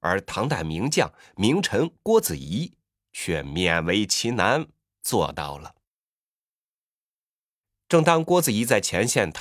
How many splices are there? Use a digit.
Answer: 0